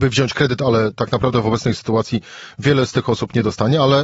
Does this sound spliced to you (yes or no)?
no